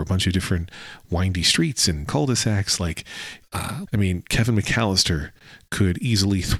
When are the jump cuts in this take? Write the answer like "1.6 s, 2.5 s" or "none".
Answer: 2.1 s, 3.4 s, 3.8 s